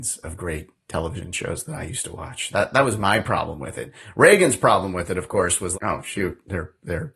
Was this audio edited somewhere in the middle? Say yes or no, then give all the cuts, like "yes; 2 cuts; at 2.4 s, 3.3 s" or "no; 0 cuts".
yes; 1 cut; at 5.7 s